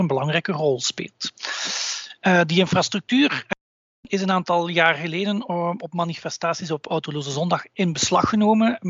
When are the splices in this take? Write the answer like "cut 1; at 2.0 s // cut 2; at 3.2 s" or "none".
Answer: none